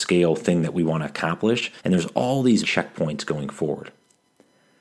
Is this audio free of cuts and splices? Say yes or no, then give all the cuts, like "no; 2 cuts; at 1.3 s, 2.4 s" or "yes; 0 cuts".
no; 2 cuts; at 1.8 s, 2.6 s